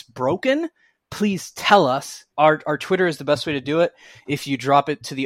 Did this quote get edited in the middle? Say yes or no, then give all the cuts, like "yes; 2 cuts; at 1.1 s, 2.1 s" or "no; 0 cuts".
yes; 1 cut; at 2.3 s